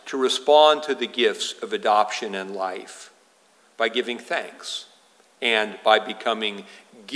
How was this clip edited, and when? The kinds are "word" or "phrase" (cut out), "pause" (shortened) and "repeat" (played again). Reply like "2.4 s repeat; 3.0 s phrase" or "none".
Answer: none